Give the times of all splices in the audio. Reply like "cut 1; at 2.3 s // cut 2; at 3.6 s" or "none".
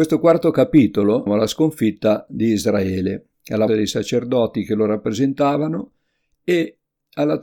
cut 1; at 1.3 s // cut 2; at 3.7 s